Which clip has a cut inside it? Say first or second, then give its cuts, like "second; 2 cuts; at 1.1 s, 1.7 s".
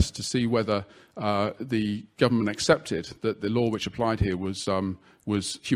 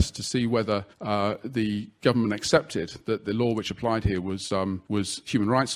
second; 2 cuts; at 0.9 s, 4.9 s